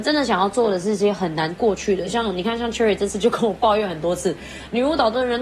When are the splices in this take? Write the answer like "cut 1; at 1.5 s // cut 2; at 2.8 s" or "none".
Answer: none